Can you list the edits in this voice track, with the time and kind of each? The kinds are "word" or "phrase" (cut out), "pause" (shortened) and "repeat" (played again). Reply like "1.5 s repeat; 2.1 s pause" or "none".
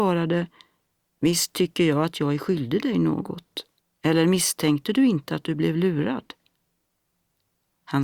3.8 s pause